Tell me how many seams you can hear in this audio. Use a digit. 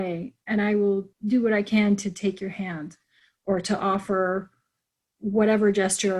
1